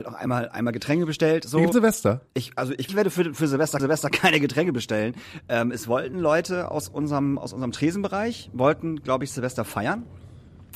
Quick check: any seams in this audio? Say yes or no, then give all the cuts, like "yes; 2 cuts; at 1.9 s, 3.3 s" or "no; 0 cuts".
yes; 4 cuts; at 1.7 s, 2.3 s, 2.9 s, 3.8 s